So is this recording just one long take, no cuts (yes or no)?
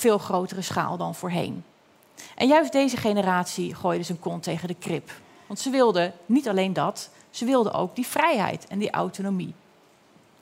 yes